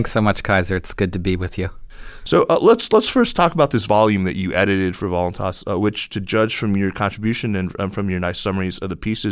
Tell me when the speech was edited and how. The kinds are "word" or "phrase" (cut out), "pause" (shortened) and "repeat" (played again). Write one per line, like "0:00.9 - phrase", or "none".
none